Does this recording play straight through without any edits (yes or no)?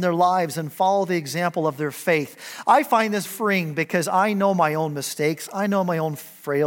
no